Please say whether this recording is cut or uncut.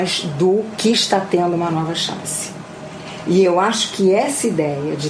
uncut